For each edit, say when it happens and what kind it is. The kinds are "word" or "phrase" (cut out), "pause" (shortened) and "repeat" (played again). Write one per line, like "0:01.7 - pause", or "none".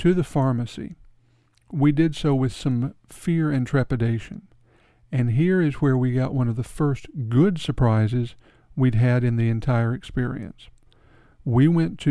none